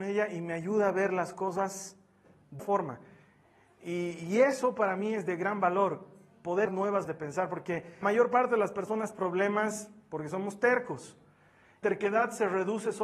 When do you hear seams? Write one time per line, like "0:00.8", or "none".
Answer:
0:02.6
0:06.7
0:07.1
0:08.0
0:09.1
0:11.8